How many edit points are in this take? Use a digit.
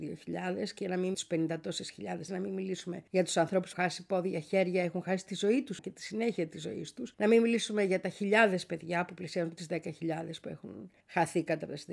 7